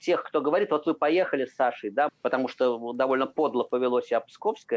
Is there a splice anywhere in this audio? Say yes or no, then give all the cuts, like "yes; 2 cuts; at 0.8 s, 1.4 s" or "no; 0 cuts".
yes; 1 cut; at 2.1 s